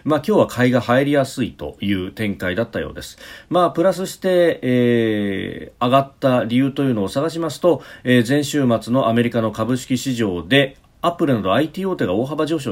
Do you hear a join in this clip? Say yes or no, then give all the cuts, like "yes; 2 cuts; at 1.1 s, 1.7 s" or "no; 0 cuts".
no; 0 cuts